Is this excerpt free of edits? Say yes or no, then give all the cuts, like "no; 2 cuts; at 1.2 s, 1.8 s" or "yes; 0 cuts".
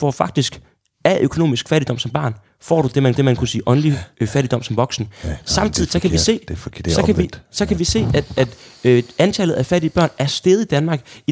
no; 2 cuts; at 3.1 s, 8.3 s